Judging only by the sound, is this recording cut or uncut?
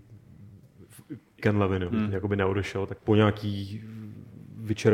cut